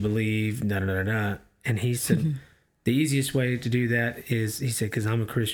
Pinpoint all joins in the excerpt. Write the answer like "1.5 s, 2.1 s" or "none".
none